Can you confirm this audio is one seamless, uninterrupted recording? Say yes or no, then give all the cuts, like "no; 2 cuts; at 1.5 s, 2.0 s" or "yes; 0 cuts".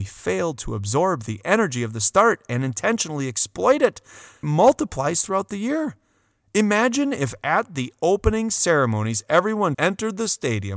no; 2 cuts; at 4.4 s, 9.7 s